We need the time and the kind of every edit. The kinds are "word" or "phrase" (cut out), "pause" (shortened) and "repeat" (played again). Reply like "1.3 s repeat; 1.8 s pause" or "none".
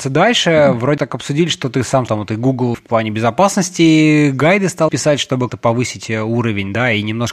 1.0 s word; 2.1 s word; 2.7 s word; 4.9 s word; 5.5 s word